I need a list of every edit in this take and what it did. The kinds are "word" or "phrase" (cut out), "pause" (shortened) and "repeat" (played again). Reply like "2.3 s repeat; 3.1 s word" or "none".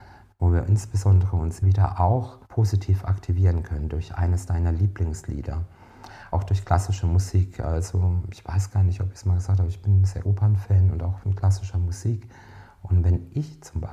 1.6 s word; 2.4 s pause; 6.3 s phrase; 10.2 s word

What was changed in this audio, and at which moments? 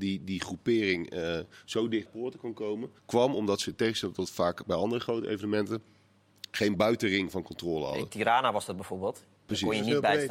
2.1 s phrase; 3.0 s pause

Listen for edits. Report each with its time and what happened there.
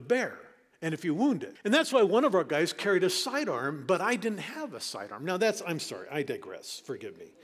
1.6 s pause

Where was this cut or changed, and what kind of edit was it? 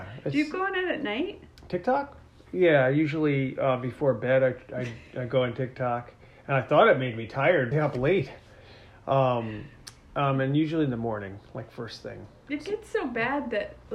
7.7 s phrase

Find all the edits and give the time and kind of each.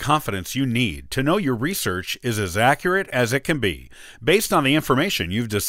none

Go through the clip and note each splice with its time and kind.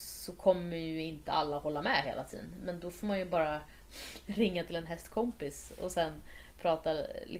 none

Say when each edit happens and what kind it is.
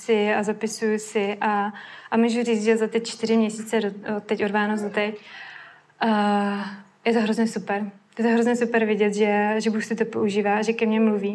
none

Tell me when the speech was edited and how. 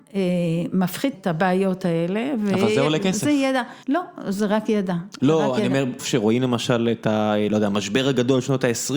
1.1 s word; 3.8 s pause; 6.0 s word

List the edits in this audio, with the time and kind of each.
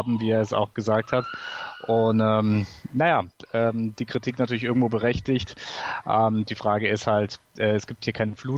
none

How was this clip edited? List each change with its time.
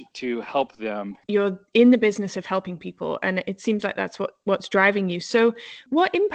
1.2 s pause

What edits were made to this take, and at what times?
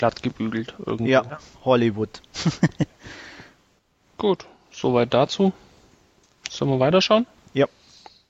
none

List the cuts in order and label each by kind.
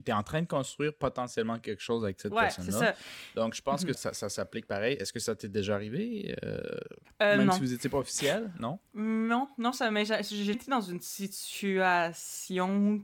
3.9 s word; 7.0 s pause; 10.5 s word

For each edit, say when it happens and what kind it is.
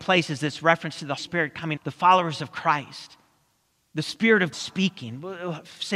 1.2 s word; 1.8 s word; 4.5 s word

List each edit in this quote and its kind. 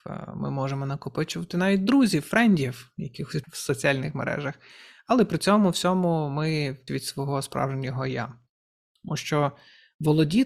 3.4 s word; 6.9 s word

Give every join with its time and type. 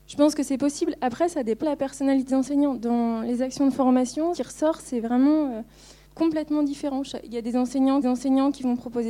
1.6 s word; 2.3 s word; 4.3 s phrase; 6.0 s pause; 8.0 s repeat

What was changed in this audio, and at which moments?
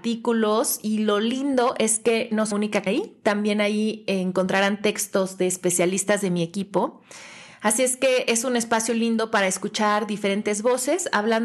2.5 s word; 2.9 s word

